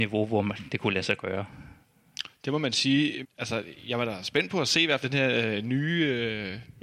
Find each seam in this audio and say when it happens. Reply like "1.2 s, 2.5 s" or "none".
3.2 s, 5.0 s